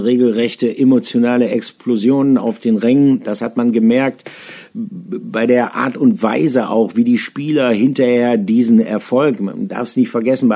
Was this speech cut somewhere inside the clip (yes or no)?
no